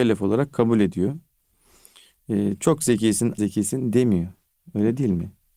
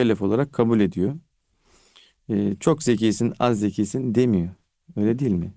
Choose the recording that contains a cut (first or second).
first